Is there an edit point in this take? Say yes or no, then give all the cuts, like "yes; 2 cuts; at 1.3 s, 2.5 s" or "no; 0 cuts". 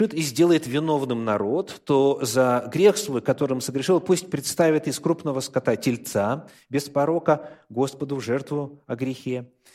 no; 0 cuts